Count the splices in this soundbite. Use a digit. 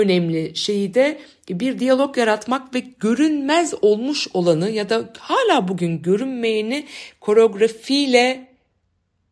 0